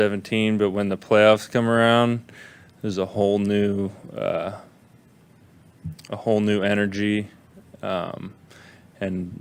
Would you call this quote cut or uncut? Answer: uncut